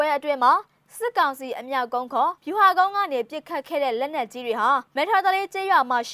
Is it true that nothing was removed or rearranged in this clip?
no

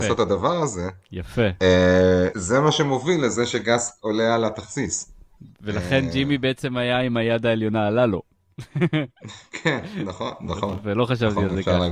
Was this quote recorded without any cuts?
no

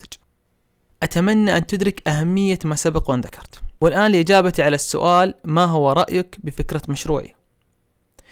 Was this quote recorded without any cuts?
no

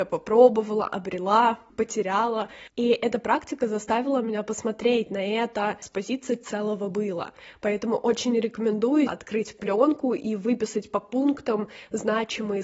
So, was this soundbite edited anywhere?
yes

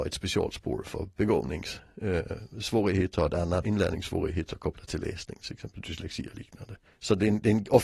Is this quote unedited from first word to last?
no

